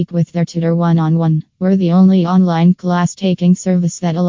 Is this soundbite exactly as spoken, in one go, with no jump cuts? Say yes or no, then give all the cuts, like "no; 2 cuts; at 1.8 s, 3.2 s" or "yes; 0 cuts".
no; 1 cut; at 1.5 s